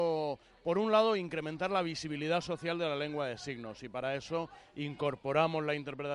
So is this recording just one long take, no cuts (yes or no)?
yes